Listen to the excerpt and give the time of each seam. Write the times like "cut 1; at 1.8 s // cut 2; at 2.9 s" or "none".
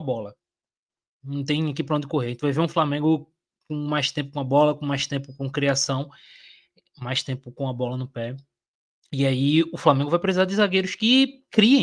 none

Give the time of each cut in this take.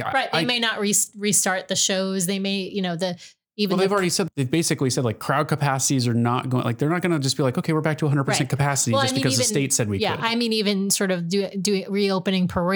none

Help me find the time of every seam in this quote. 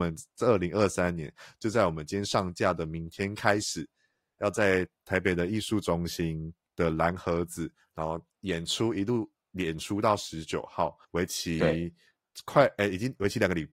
cut 1; at 6.6 s // cut 2; at 8.3 s // cut 3; at 11.0 s

